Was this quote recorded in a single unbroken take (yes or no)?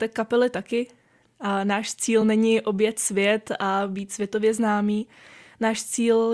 yes